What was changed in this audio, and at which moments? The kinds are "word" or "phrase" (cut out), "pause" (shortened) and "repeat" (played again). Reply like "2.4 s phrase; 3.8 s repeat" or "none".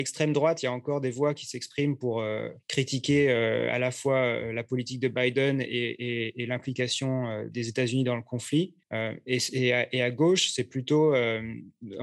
2.6 s pause; 7.5 s word; 8.8 s pause

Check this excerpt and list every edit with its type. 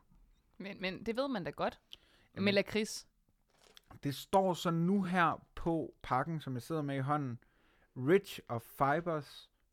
none

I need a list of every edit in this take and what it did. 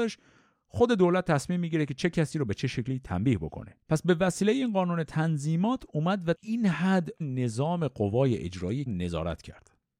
3.8 s pause; 6.3 s word; 7.2 s word; 8.9 s word

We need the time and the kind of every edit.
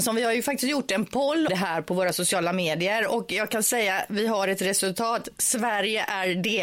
1.5 s word

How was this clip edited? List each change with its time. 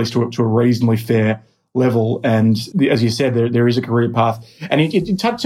none

